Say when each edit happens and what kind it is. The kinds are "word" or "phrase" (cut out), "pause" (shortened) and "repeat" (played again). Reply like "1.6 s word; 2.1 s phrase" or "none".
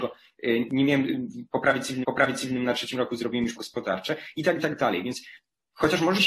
2.0 s repeat; 3.6 s word; 4.6 s word